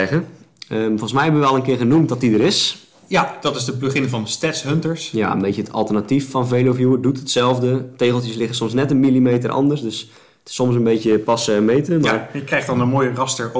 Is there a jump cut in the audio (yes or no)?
no